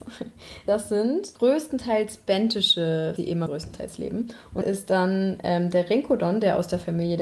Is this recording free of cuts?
no; 4 cuts; at 1.4 s, 3.2 s, 3.5 s, 4.6 s

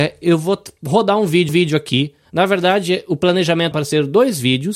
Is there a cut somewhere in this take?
yes; 2 cuts; at 1.5 s, 3.7 s

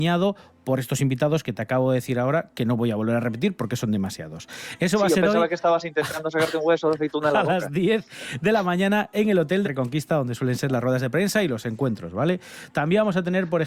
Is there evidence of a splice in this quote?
yes; 1 cut; at 9.6 s

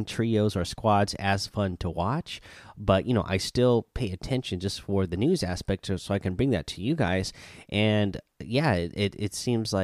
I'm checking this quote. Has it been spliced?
no; 0 cuts

